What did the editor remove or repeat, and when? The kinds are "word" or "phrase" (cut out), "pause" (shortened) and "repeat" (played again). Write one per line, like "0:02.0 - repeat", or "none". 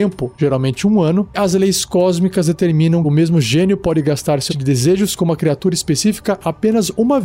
0:01.3 - word
0:03.0 - word
0:04.5 - word

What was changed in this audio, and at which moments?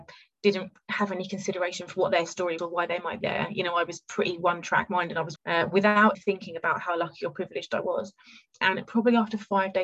0:02.6 - word
0:03.2 - word
0:05.4 - phrase
0:06.1 - word

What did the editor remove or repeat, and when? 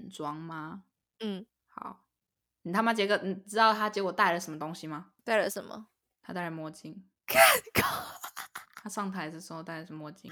0:01.5 - pause
0:05.2 - pause

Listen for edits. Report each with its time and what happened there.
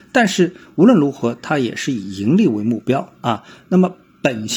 none

